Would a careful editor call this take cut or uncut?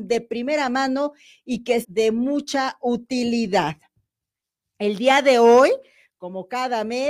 cut